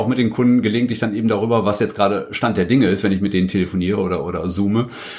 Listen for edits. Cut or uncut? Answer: uncut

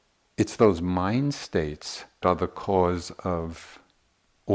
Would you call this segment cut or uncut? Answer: cut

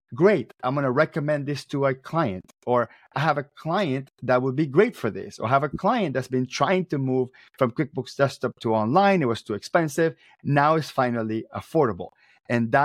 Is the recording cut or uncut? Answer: uncut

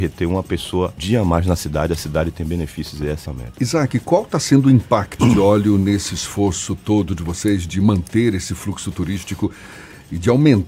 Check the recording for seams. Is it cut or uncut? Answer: cut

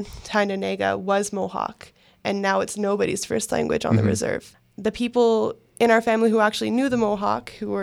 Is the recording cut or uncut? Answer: uncut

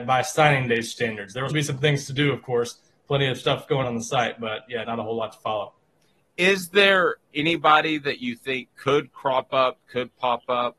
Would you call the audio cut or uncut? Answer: cut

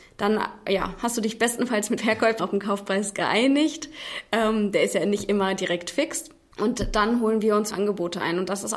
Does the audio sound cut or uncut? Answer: cut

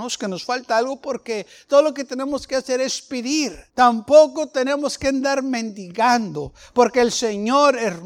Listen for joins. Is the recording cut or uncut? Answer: cut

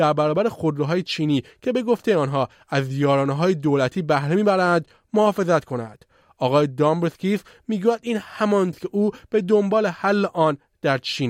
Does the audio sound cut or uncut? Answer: cut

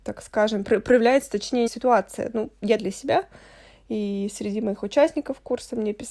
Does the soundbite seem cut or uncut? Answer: cut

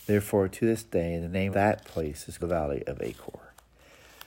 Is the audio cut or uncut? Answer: cut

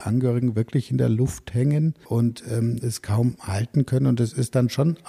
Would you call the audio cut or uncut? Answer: cut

